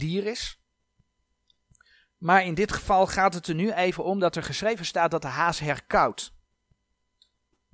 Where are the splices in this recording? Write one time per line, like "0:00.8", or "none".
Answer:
none